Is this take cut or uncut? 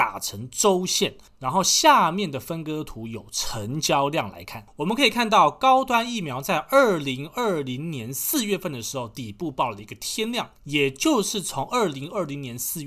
uncut